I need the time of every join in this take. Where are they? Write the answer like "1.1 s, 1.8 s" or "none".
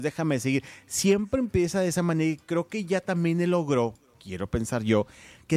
none